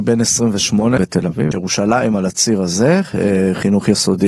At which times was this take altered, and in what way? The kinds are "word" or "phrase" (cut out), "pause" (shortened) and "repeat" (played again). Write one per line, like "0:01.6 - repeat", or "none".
0:01.0 - phrase
0:01.5 - phrase